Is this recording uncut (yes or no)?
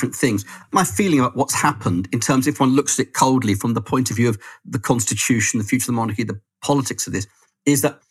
yes